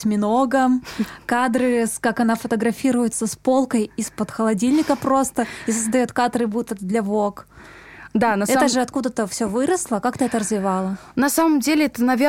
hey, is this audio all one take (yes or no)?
yes